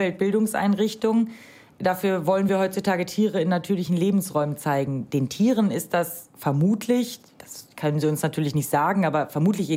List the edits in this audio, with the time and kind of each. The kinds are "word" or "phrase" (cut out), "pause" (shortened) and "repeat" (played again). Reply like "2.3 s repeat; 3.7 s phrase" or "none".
none